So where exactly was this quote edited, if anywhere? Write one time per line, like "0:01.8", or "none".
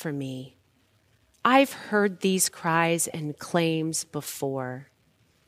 none